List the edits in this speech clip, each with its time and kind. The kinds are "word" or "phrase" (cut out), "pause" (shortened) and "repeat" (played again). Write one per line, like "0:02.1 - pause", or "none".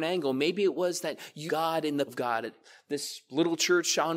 0:01.5 - phrase
0:02.1 - word